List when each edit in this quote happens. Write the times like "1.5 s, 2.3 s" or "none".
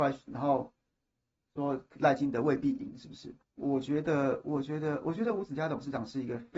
1.9 s, 3.4 s